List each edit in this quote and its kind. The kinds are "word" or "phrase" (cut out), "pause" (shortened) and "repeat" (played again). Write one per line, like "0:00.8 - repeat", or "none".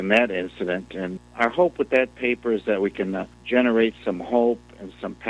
0:01.2 - word
0:03.3 - pause

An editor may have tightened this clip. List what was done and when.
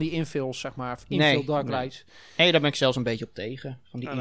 none

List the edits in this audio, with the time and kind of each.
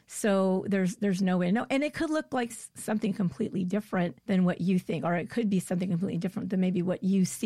0:04.2 - pause

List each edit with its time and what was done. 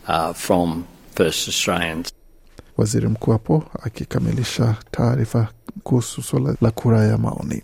0:02.7 - pause
0:05.8 - word
0:06.5 - word

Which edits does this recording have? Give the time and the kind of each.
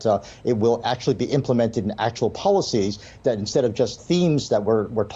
0:04.0 - word

